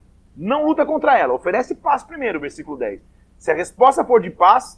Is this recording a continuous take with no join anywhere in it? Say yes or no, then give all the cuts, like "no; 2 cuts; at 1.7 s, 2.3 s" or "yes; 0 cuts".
yes; 0 cuts